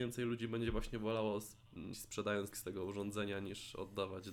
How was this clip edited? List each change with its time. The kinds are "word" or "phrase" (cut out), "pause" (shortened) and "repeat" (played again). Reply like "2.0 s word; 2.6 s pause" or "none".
1.9 s word; 2.5 s phrase